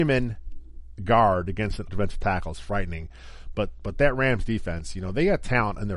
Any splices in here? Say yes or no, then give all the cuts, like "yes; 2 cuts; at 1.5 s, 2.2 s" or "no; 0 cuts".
yes; 1 cut; at 1.9 s